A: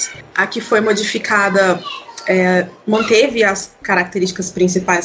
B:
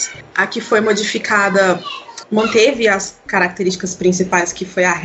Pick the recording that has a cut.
B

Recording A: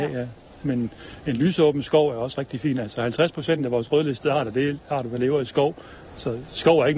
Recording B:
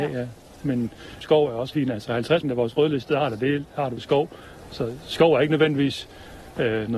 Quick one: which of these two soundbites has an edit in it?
B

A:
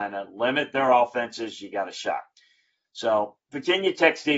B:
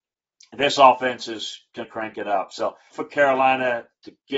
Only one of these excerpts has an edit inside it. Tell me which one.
B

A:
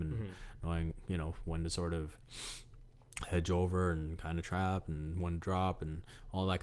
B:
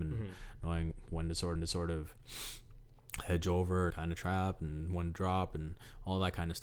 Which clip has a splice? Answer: B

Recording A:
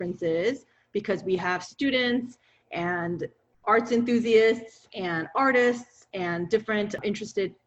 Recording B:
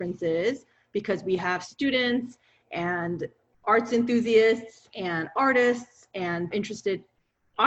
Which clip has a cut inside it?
B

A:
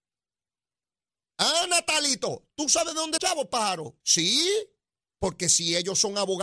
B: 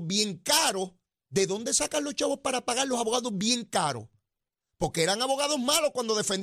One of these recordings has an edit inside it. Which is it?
A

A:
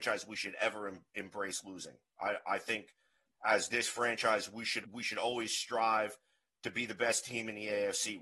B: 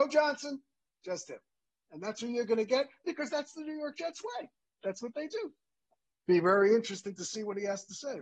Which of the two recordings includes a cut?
A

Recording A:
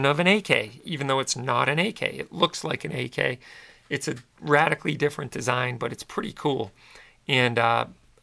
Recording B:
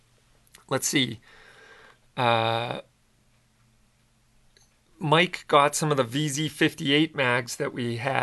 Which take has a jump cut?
A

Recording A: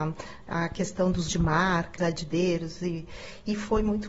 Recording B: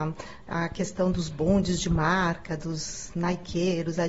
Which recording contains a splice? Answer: A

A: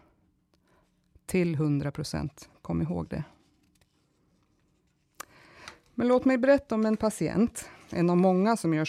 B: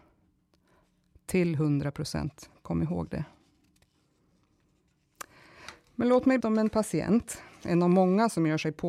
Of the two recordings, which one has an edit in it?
B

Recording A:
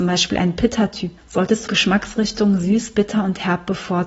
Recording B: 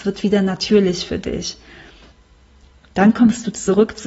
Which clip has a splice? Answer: A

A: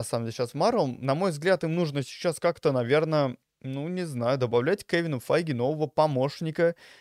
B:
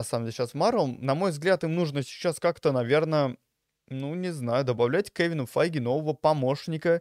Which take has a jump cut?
A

